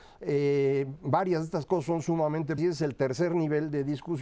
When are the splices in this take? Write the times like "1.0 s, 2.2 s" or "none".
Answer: 2.6 s

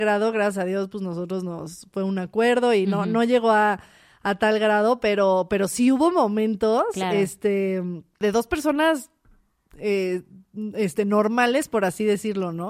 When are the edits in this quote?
none

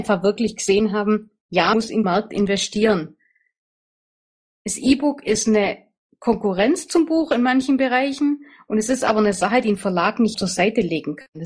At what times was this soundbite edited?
1.7 s, 2.0 s, 10.3 s

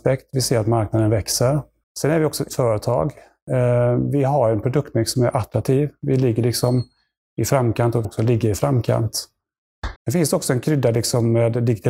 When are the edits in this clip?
1.8 s, 2.5 s, 8.0 s, 10.0 s

